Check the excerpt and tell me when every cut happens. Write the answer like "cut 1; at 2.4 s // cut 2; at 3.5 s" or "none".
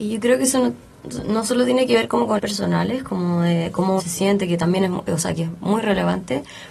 cut 1; at 2.4 s // cut 2; at 4.0 s

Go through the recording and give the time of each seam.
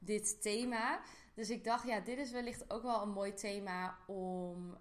none

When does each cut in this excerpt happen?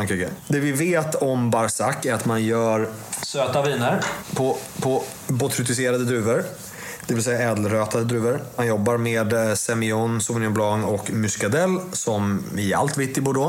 cut 1; at 4.7 s

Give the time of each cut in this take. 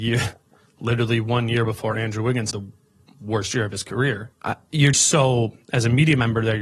cut 1; at 2.5 s // cut 2; at 4.3 s // cut 3; at 4.9 s

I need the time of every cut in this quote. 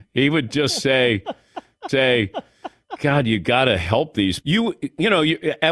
cut 1; at 1.9 s // cut 2; at 4.4 s

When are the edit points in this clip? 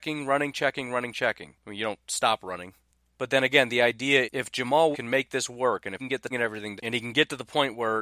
cut 1; at 4.2 s // cut 2; at 4.9 s // cut 3; at 6.0 s // cut 4; at 6.3 s // cut 5; at 6.8 s

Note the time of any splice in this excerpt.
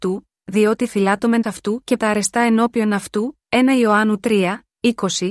cut 1; at 1.4 s // cut 2; at 2.0 s

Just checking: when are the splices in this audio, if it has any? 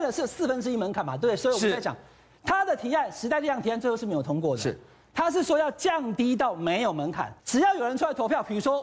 cut 1; at 7.4 s

